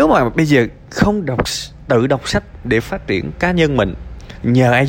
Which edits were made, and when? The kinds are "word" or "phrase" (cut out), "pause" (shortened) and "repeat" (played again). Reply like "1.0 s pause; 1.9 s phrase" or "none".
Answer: none